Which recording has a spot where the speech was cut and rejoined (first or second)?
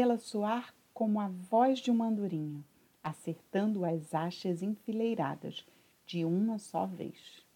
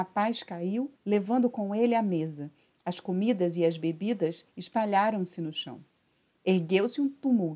second